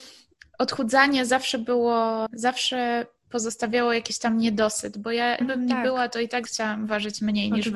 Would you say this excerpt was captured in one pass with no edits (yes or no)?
no